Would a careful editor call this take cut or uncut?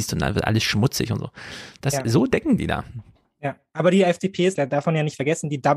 cut